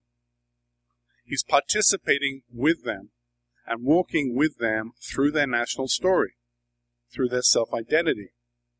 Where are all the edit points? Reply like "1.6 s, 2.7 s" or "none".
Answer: none